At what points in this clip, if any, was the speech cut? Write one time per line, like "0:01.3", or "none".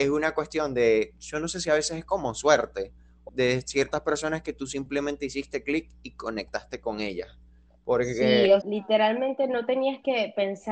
0:03.3
0:08.6